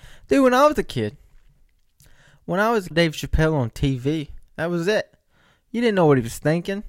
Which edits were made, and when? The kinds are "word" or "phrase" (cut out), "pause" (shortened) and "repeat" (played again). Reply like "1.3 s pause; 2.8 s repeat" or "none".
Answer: 2.9 s phrase